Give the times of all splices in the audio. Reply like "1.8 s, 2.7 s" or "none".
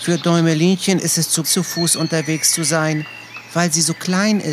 1.4 s